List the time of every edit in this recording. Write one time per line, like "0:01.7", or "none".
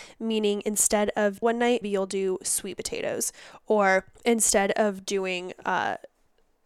0:01.4
0:01.8
0:04.2